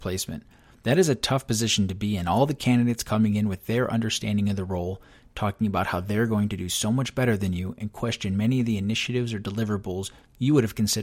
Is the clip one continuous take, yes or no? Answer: yes